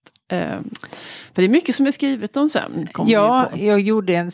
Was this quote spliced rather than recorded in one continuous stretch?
no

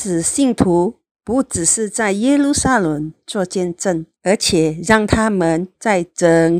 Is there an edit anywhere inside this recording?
yes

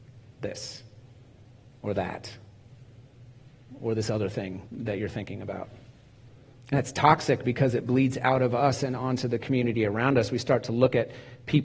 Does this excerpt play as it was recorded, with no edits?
no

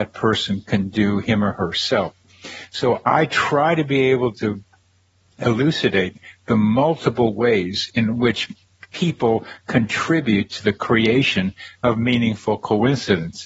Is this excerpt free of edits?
yes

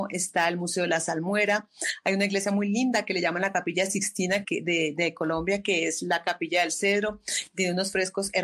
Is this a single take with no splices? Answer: no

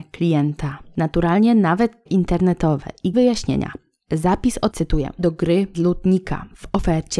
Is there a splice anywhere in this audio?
yes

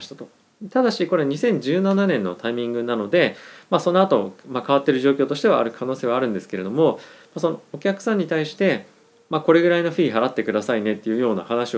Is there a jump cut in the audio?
no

